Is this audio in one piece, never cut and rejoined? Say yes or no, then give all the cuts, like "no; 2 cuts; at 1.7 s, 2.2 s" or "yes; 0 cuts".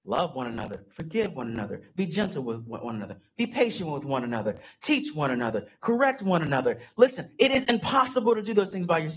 yes; 0 cuts